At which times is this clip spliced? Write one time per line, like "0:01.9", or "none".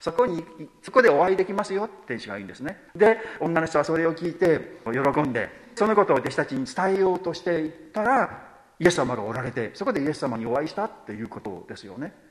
0:02.9
0:04.9
0:05.8